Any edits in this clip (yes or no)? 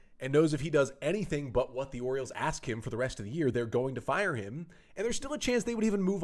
no